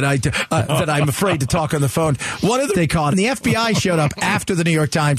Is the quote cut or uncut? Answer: cut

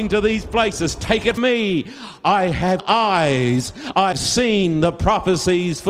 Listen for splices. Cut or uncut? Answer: cut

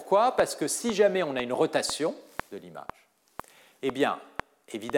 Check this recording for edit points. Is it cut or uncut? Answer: uncut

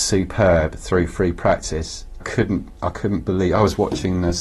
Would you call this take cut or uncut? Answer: cut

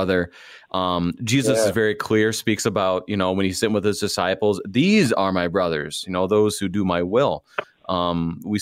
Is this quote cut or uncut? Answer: uncut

